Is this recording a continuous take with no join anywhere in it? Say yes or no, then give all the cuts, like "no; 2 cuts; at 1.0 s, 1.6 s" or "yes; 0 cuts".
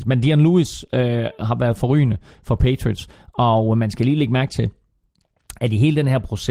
yes; 0 cuts